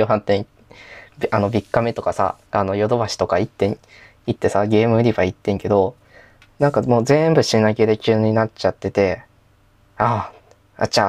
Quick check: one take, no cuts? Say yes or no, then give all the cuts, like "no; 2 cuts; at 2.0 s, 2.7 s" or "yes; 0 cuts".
no; 1 cut; at 2.5 s